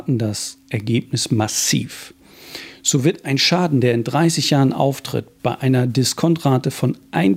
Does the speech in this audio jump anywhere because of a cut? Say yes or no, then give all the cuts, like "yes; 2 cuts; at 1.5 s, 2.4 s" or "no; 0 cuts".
no; 0 cuts